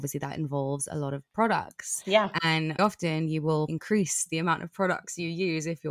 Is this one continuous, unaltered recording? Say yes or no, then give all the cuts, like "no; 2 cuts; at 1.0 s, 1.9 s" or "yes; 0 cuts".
no; 2 cuts; at 2.8 s, 3.7 s